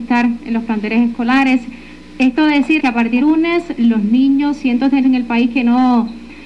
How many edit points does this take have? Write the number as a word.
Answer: five